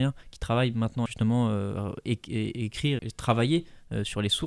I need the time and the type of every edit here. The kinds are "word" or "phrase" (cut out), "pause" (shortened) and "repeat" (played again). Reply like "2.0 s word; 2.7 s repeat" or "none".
1.1 s phrase; 3.0 s word

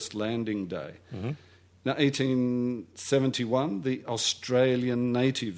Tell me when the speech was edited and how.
none

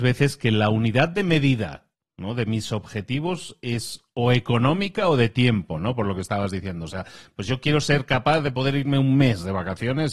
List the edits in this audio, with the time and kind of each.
none

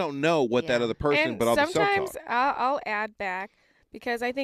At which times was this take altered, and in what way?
none

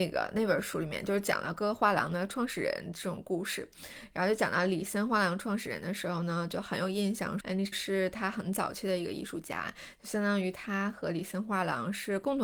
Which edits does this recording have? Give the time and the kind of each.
7.4 s word; 7.7 s word

